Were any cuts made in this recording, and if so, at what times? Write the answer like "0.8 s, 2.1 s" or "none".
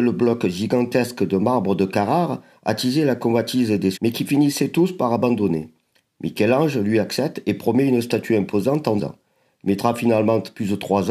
3.9 s, 9.0 s